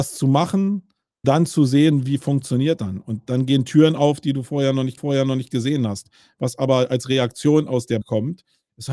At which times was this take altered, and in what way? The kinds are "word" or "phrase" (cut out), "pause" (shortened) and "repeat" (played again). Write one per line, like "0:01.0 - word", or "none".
0:01.2 - word
0:02.8 - word
0:05.0 - repeat
0:08.0 - phrase